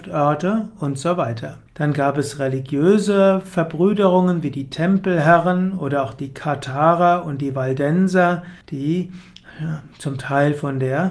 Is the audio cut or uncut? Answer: cut